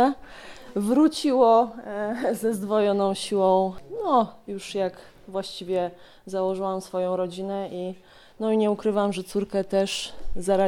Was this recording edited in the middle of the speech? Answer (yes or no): no